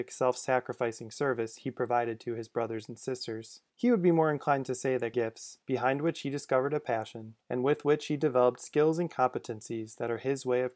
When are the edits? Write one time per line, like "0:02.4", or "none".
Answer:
0:03.7
0:05.1
0:05.6
0:07.4